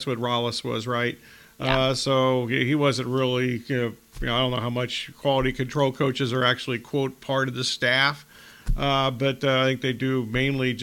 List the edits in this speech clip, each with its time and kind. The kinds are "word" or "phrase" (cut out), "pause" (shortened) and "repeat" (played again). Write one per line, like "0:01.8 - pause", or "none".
none